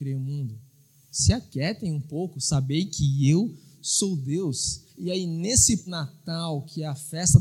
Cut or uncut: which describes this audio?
cut